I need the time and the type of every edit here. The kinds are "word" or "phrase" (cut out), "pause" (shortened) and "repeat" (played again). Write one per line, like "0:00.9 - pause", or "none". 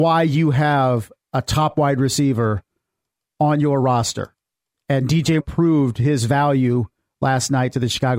0:05.4 - word